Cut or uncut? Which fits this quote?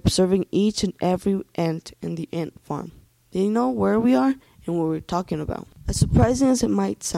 uncut